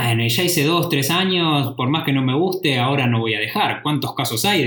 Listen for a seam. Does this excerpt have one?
no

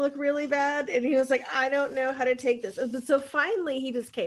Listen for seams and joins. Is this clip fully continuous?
yes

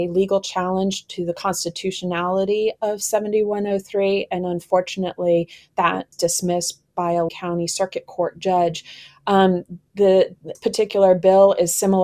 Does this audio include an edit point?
yes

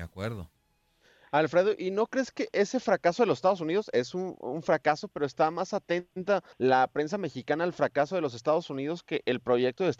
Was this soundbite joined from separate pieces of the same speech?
yes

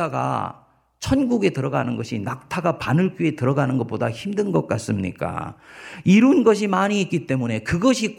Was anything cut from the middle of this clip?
no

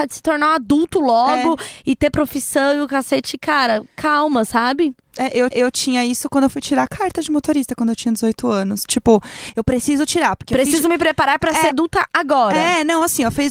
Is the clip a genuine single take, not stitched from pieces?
no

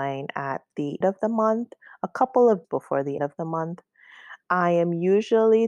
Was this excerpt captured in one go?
no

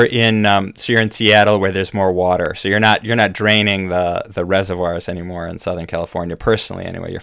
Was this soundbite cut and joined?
no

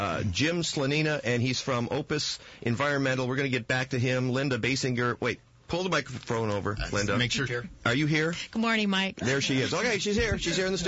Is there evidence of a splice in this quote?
yes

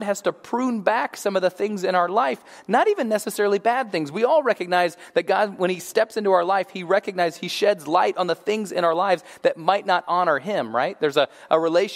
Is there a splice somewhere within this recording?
no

